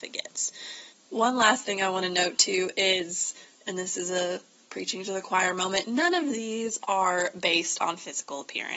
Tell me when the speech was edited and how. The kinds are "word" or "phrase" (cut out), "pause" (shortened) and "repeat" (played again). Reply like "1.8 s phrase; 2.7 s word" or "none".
none